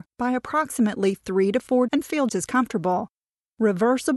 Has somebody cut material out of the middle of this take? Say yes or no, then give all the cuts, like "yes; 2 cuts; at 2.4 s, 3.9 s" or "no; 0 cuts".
yes; 2 cuts; at 1.9 s, 2.3 s